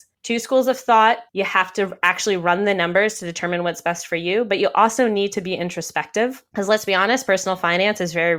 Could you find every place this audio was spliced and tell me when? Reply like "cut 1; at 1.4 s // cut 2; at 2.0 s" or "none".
cut 1; at 1.3 s